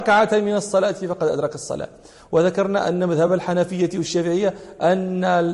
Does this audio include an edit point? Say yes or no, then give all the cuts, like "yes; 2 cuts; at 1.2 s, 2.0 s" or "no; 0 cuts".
no; 0 cuts